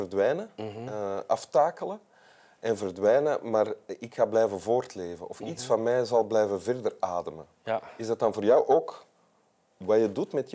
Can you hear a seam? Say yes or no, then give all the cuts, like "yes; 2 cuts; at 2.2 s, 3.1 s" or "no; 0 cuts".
no; 0 cuts